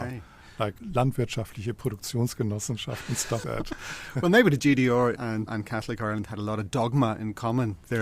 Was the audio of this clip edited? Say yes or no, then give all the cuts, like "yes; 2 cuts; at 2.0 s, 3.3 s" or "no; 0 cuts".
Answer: yes; 3 cuts; at 3.4 s, 5.2 s, 5.5 s